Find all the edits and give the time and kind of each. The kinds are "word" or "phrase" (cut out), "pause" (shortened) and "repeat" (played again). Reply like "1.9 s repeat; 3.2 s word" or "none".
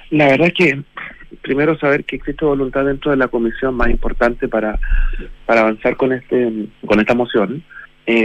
6.7 s pause